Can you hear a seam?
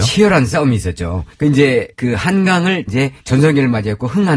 yes; 4 cuts; at 1.3 s, 1.9 s, 2.9 s, 3.2 s

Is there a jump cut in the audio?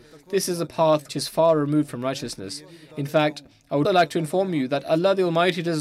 yes; 2 cuts; at 1.1 s, 3.8 s

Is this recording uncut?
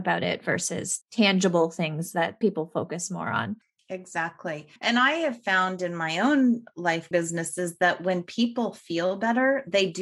no; 4 cuts; at 1.0 s, 2.4 s, 4.8 s, 7.1 s

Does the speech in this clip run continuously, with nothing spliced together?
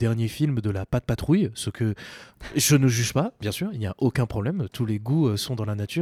yes; 0 cuts

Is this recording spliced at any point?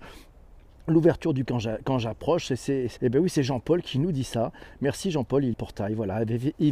yes; 3 cuts; at 1.5 s, 3.0 s, 5.5 s

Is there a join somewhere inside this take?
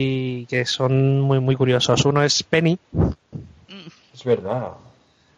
no; 0 cuts

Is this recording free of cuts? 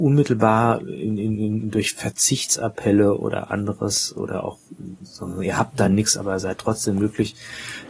yes; 0 cuts

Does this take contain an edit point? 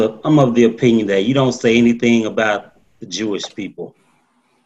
yes; 1 cut; at 2.9 s

